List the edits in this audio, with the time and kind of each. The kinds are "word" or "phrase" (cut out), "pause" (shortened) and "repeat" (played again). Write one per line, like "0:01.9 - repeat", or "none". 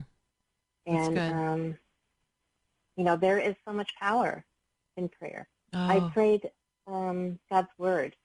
0:05.6 - pause